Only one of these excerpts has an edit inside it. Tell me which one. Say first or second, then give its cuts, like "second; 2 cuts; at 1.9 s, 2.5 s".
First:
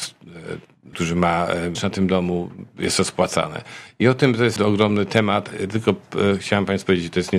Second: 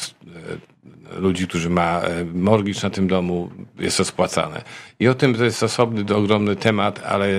first; 4 cuts; at 0.9 s, 1.7 s, 4.6 s, 5.5 s